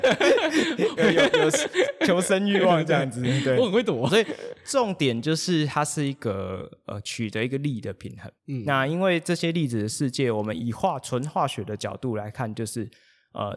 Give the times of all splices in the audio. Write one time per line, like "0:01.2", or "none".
0:01.0
0:04.1
0:08.4